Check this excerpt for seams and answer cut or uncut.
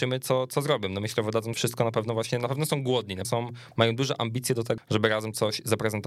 cut